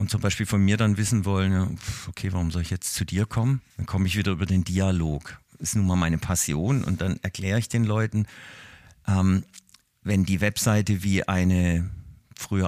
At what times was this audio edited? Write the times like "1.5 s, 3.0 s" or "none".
3.7 s